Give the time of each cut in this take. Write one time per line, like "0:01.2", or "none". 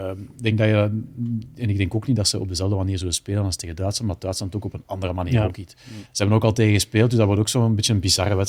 0:06.1